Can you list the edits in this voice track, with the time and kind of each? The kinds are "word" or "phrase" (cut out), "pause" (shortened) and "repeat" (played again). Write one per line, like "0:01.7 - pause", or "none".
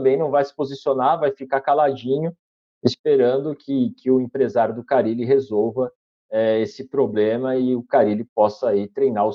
none